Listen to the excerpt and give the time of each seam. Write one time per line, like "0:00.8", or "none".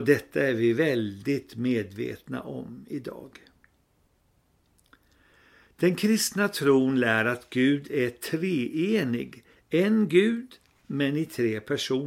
none